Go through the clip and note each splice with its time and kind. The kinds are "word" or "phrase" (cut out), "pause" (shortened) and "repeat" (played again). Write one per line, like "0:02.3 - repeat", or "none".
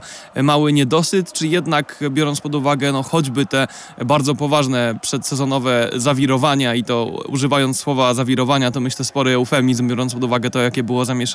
none

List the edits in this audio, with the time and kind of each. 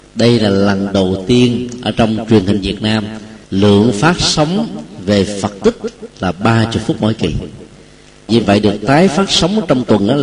0:03.4 - pause
0:08.3 - phrase

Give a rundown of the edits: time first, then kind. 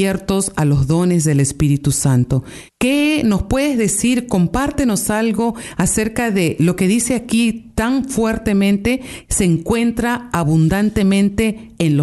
0:02.7 - pause

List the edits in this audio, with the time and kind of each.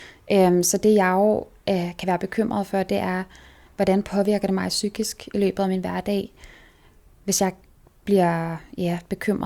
none

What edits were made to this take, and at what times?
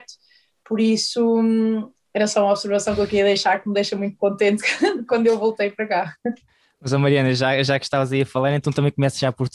none

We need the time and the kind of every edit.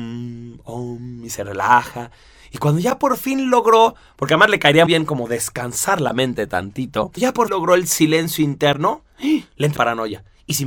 0:04.9 - word
0:07.2 - word
0:07.5 - word
0:09.8 - word

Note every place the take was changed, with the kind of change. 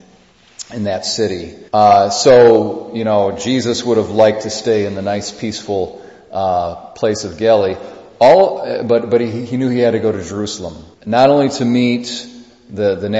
0:01.7 - pause
0:10.9 - pause

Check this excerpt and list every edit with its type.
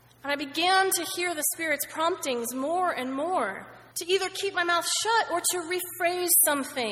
0:03.9 - pause

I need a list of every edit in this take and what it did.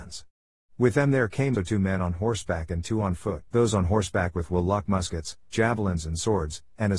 0:01.5 - word
0:03.5 - pause
0:05.5 - phrase

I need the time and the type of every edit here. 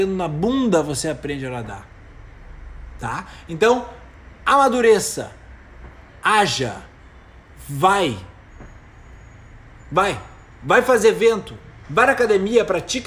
0:11.8 - word

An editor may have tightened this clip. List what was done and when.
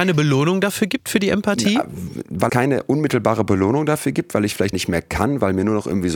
0:02.5 - word
0:04.7 - word

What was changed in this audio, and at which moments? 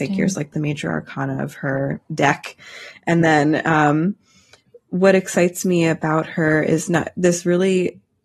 none

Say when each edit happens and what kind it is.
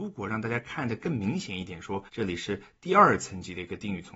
0:02.1 - pause

